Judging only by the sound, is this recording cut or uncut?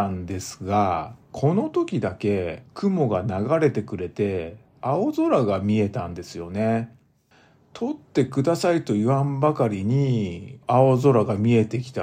cut